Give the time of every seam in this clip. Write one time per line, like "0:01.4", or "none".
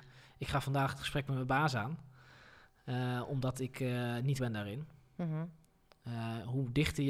0:04.4